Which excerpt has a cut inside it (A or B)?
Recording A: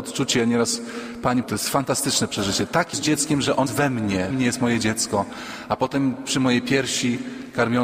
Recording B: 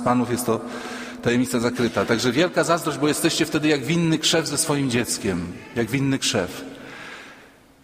A